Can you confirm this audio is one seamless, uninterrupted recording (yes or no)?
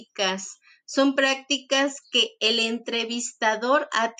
yes